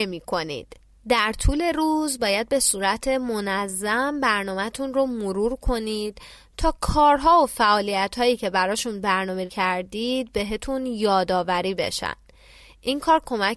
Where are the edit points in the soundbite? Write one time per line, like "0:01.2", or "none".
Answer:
0:09.5